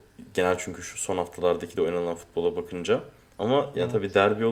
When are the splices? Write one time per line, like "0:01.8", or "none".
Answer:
none